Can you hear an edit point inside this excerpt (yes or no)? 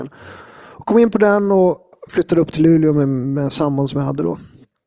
no